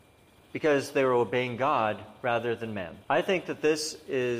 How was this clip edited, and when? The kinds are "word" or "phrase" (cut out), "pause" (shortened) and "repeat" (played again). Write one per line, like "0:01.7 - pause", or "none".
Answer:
0:03.0 - pause